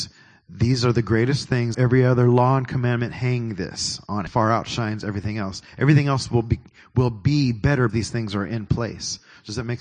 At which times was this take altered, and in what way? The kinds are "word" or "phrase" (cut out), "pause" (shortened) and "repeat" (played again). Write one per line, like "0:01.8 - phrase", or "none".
0:01.7 - word
0:04.3 - phrase
0:07.9 - word